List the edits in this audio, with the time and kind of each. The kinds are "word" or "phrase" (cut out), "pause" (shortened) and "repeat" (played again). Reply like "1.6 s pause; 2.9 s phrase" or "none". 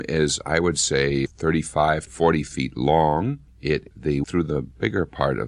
1.3 s word; 2.1 s word; 3.9 s word; 4.2 s word

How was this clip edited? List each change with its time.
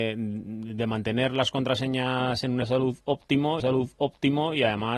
2.6 s word; 3.6 s repeat

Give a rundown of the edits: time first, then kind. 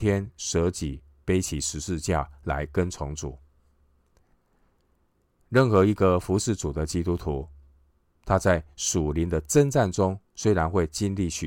10.3 s pause

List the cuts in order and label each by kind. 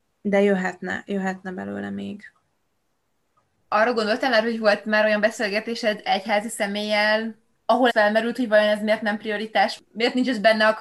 7.9 s word

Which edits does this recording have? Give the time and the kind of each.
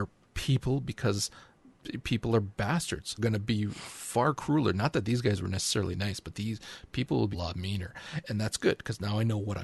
3.2 s phrase; 7.3 s word; 8.2 s word

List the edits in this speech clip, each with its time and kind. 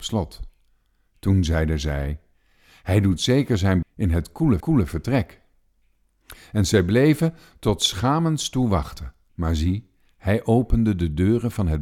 3.8 s word; 4.6 s repeat; 9.3 s pause

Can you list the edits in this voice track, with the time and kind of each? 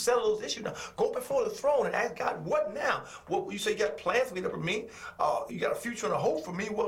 1.1 s word; 4.5 s word; 5.5 s word

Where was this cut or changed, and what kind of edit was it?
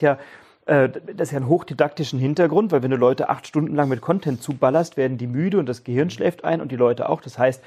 none

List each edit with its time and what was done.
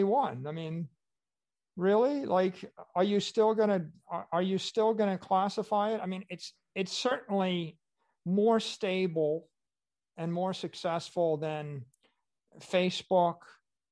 none

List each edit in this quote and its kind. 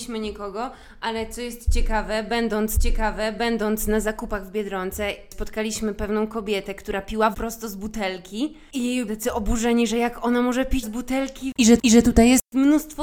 2.8 s repeat; 7.3 s word; 9.1 s word; 10.8 s word; 11.8 s repeat

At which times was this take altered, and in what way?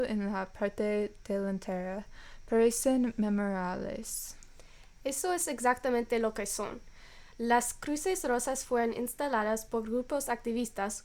none

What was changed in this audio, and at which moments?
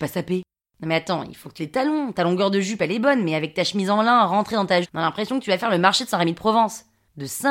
1.6 s word; 4.8 s phrase

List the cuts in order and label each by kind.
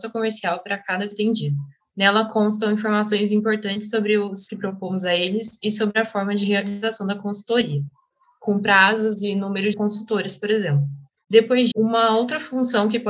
1.1 s word; 4.5 s word; 9.7 s word; 11.7 s word

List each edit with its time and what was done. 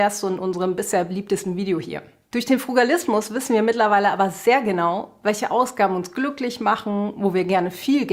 none

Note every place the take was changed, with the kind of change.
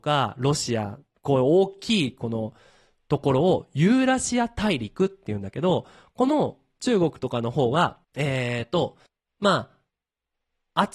8.0 s pause; 9.1 s pause

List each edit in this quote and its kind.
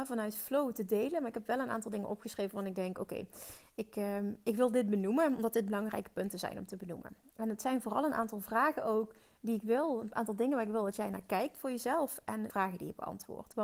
12.5 s word

